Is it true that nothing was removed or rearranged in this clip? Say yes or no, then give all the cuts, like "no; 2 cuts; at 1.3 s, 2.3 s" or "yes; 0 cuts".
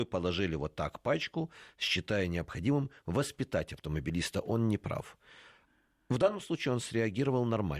yes; 0 cuts